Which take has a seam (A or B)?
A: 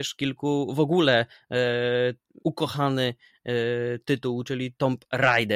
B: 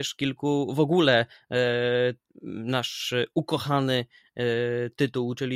A